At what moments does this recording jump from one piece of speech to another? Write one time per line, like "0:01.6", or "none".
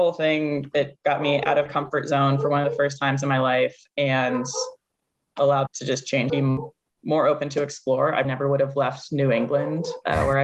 0:01.7
0:05.7
0:06.3
0:08.2